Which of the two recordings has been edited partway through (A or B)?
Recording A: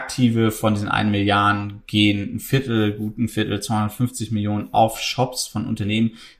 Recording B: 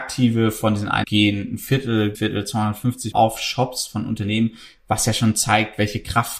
B